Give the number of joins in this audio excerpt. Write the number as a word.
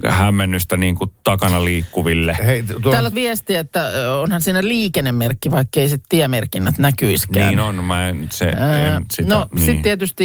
one